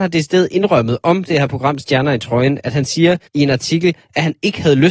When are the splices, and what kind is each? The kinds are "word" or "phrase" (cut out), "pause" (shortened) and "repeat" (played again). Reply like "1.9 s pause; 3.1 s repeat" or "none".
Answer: 3.3 s pause